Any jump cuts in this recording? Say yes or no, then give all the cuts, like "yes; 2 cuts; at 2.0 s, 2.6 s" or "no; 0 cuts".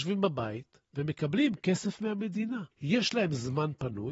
yes; 1 cut; at 2.7 s